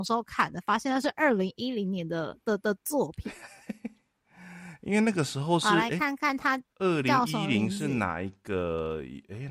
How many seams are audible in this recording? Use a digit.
1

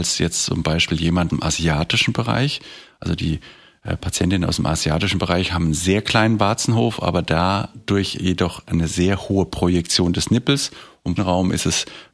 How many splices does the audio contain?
2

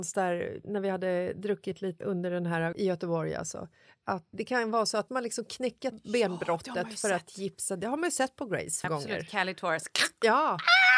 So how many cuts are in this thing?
6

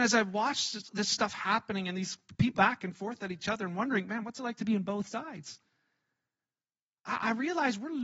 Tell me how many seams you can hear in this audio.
1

